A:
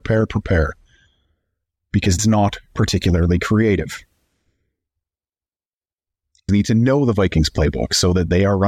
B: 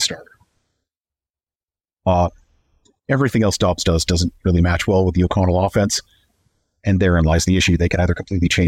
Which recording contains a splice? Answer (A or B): A